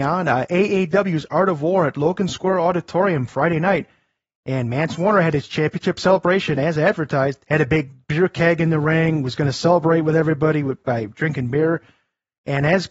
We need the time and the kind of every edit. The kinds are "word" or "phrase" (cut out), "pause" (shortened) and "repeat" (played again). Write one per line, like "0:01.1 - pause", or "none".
none

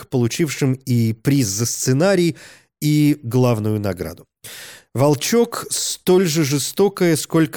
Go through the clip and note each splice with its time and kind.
none

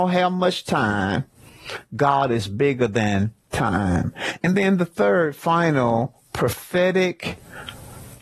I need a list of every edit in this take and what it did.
none

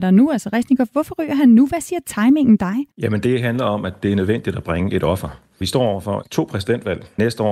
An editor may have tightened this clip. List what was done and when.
0:02.9 - pause

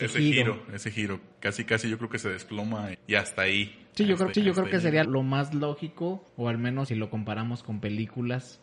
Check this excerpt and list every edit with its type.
0:01.3 - pause
0:02.9 - word
0:04.3 - repeat
0:05.0 - word
0:06.3 - pause
0:06.9 - word

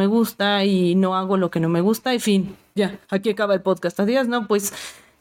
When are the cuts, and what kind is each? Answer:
0:03.0 - pause

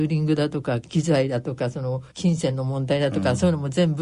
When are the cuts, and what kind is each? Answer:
0:02.1 - pause

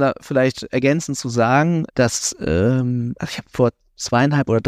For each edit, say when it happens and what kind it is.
0:01.9 - word

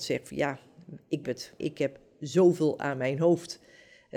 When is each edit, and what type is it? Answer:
0:01.2 - word
0:01.6 - word

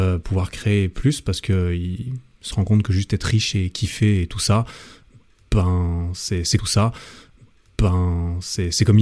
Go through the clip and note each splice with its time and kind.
0:06.6 - repeat

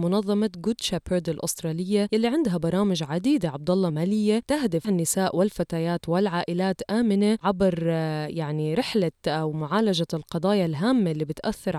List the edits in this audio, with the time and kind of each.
0:03.9 - phrase
0:04.8 - phrase
0:07.4 - word

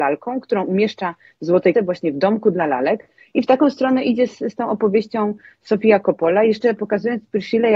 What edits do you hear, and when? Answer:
0:01.7 - word

